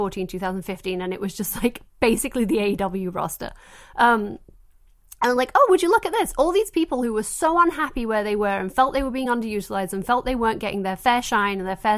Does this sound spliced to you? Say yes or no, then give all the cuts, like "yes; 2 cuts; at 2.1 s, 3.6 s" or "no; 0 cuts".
no; 0 cuts